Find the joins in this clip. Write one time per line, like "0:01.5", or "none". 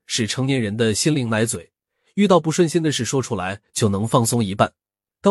none